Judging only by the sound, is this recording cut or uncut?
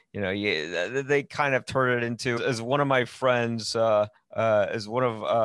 cut